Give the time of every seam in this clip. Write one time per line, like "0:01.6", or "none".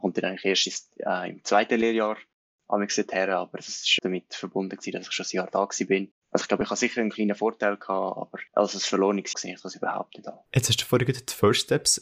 0:04.0
0:08.5
0:09.3
0:10.5